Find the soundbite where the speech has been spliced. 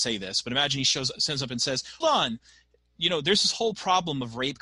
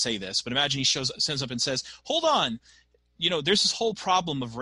first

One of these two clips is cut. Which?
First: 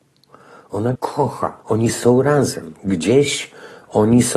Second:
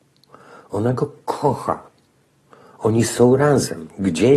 first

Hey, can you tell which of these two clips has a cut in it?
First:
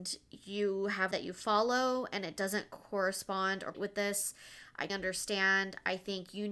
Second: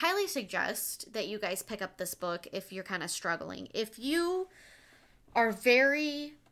first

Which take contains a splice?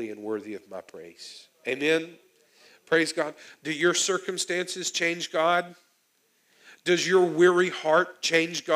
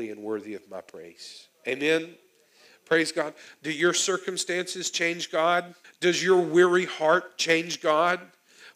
second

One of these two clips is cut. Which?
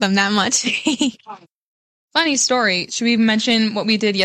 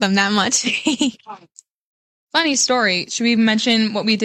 first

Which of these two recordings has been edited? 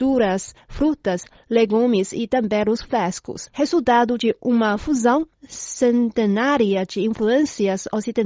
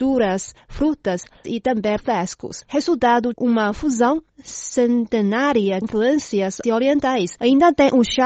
second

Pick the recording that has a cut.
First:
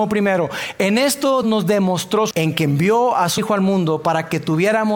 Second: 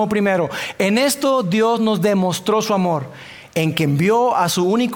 first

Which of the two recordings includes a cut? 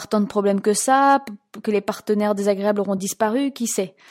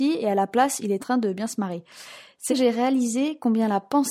second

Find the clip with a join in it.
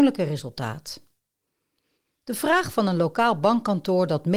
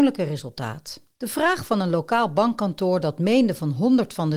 second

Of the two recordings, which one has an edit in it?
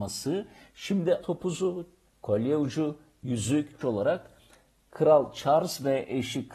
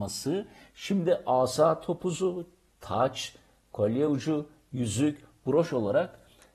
first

